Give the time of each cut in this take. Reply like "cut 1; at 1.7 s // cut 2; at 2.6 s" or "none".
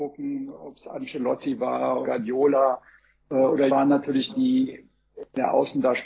cut 1; at 2.0 s // cut 2; at 3.7 s // cut 3; at 4.3 s

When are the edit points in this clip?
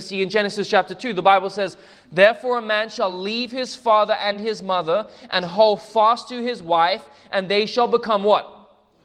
none

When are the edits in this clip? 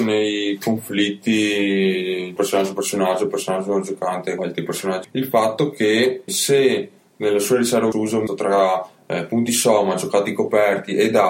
cut 1; at 2.4 s // cut 2; at 4.4 s // cut 3; at 5.0 s // cut 4; at 6.3 s // cut 5; at 7.9 s // cut 6; at 8.3 s

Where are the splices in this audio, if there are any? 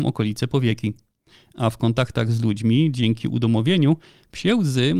none

